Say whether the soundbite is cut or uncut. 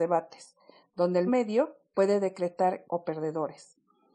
cut